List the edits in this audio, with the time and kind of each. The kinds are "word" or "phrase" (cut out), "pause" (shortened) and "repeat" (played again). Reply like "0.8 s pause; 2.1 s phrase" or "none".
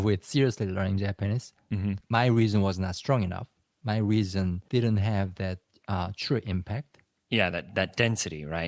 none